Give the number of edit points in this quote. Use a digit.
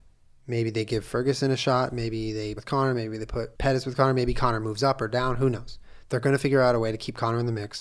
2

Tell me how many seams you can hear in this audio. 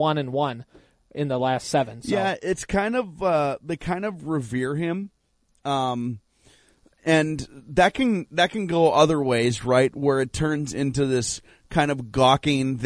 0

